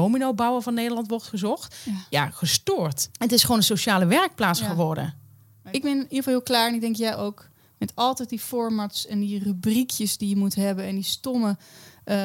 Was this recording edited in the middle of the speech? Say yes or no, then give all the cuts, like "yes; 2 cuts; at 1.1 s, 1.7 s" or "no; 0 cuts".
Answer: no; 0 cuts